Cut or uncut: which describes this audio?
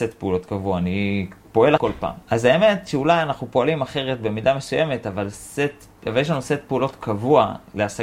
cut